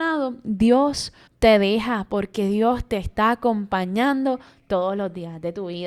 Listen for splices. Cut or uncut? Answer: cut